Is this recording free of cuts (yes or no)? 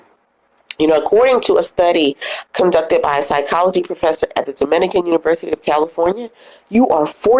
yes